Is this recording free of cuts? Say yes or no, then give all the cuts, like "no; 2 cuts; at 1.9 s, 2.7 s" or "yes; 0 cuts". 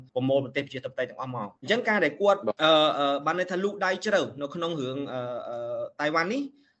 yes; 0 cuts